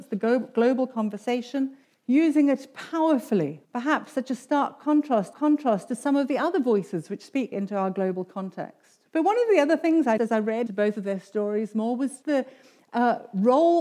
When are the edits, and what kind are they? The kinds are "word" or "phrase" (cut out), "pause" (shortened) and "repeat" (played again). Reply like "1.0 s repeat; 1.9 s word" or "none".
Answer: 1.8 s pause; 3.6 s pause; 5.3 s repeat; 7.5 s word; 9.1 s pause; 10.2 s word; 10.7 s word; 12.2 s word